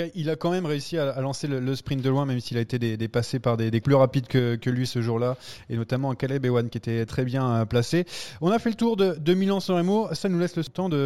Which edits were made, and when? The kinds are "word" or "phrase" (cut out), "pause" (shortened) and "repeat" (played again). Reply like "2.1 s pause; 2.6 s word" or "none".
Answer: 3.8 s word; 7.1 s word